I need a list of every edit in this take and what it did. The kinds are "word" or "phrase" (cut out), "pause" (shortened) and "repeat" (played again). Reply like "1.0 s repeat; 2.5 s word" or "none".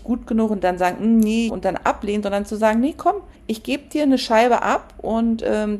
1.5 s phrase; 3.4 s pause